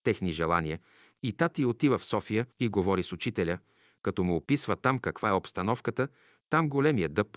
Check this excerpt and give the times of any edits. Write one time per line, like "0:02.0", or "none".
0:02.5